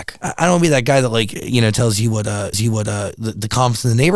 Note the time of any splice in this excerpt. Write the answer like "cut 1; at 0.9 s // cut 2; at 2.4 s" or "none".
cut 1; at 2.5 s